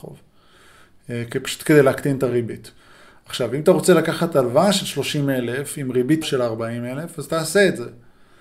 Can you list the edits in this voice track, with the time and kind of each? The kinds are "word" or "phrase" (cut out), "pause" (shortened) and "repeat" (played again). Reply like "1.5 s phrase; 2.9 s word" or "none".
6.2 s phrase